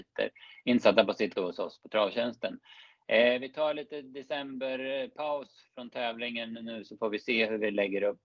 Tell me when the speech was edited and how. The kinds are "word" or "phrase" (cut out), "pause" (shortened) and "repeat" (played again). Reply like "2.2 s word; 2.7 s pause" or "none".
1.4 s word